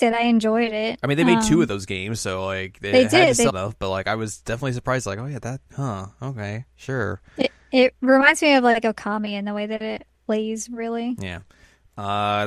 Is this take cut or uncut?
cut